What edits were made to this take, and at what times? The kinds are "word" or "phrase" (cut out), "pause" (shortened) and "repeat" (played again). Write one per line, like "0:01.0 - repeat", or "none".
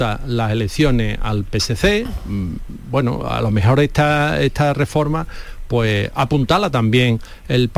none